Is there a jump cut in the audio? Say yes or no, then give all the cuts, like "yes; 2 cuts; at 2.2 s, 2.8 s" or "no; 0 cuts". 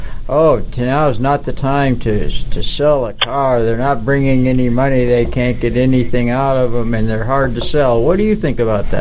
no; 0 cuts